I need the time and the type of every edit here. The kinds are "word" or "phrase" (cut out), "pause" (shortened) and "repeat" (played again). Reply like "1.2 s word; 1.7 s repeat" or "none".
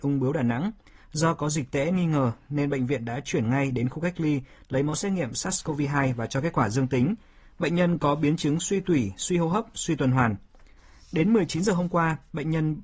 none